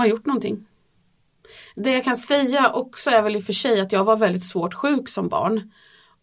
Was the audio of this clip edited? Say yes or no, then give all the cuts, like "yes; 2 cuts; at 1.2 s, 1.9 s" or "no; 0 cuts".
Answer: no; 0 cuts